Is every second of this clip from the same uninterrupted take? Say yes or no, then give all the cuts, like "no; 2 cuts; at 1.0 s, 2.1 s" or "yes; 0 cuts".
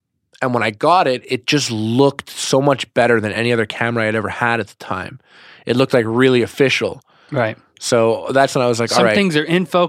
yes; 0 cuts